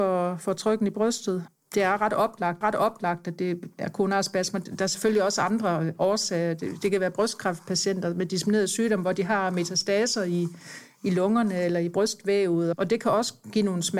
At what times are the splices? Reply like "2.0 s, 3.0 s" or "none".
2.6 s